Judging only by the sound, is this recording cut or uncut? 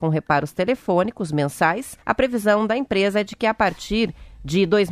cut